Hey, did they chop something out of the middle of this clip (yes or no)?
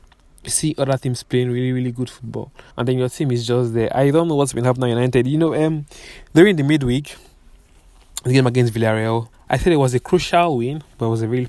yes